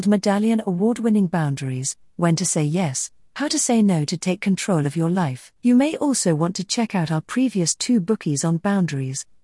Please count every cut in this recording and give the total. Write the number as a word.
one